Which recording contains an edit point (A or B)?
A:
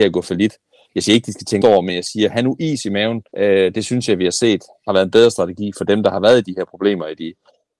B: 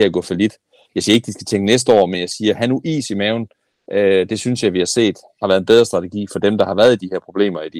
A